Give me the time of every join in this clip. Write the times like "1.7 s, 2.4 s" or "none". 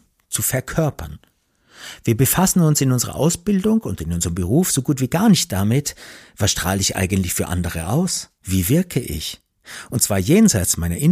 8.3 s